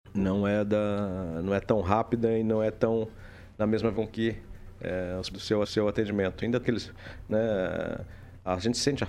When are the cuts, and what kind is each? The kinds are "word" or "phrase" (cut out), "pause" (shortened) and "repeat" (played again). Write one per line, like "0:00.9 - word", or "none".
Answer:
0:03.9 - word
0:05.3 - phrase
0:05.6 - repeat
0:06.6 - word